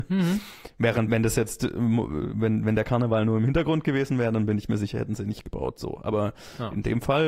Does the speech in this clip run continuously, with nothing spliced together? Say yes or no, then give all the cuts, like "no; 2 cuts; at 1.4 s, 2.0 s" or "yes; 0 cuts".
no; 1 cut; at 1.1 s